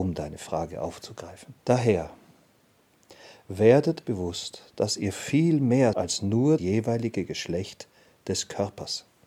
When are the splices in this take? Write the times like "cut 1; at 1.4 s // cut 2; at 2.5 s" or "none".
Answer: cut 1; at 1.6 s // cut 2; at 4.0 s // cut 3; at 5.9 s // cut 4; at 6.6 s

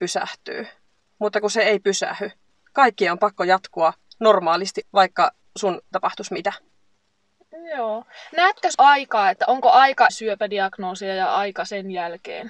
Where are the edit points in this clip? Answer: cut 1; at 4.8 s // cut 2; at 5.9 s // cut 3; at 8.7 s // cut 4; at 10.1 s

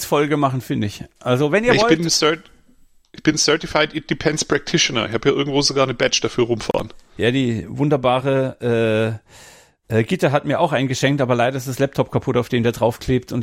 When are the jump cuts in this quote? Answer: none

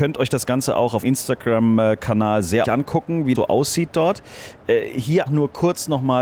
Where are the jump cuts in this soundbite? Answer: cut 1; at 1.0 s // cut 2; at 2.6 s // cut 3; at 3.3 s // cut 4; at 5.3 s

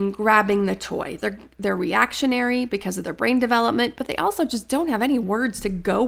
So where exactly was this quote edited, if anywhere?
none

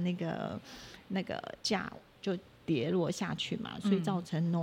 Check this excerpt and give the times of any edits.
cut 1; at 1.6 s

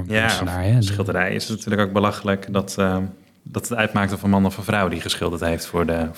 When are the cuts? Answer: none

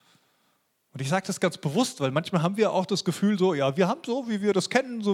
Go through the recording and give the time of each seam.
none

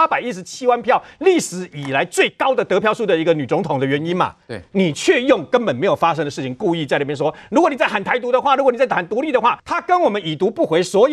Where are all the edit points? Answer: cut 1; at 9.6 s

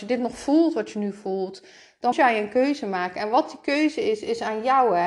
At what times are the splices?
cut 1; at 2.1 s

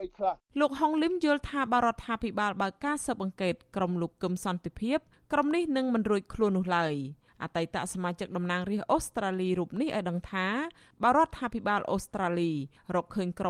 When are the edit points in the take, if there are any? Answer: none

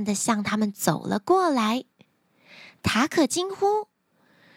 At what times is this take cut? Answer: none

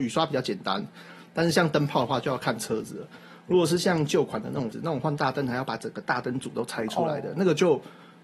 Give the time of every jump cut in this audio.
cut 1; at 4.7 s

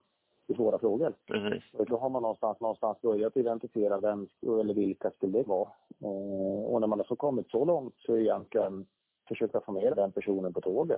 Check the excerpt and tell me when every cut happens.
cut 1; at 1.2 s // cut 2; at 1.9 s // cut 3; at 2.6 s // cut 4; at 5.5 s // cut 5; at 9.0 s // cut 6; at 9.9 s

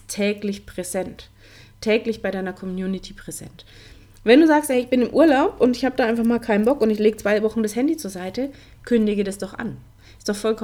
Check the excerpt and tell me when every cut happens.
none

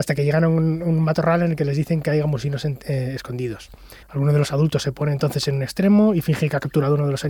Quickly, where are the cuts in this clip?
cut 1; at 4.0 s

